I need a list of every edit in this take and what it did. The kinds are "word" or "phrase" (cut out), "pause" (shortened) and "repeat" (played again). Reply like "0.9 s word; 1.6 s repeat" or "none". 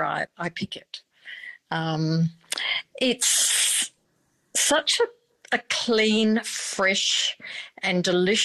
none